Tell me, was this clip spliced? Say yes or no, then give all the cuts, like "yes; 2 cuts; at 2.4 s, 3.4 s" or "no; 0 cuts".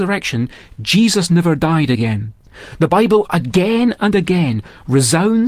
no; 0 cuts